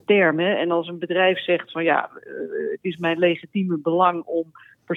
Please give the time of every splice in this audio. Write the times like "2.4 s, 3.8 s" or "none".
none